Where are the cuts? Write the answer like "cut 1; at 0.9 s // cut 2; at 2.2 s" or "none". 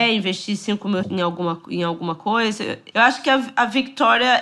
cut 1; at 1.0 s // cut 2; at 2.9 s